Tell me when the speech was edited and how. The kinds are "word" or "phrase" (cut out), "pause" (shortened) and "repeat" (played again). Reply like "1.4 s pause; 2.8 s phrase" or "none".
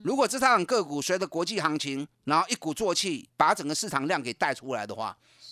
2.1 s pause; 3.3 s pause